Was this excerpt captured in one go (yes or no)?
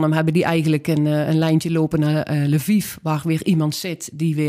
yes